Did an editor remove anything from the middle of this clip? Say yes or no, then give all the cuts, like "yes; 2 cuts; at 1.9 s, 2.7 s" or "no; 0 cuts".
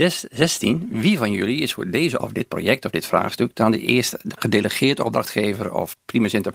yes; 1 cut; at 2.2 s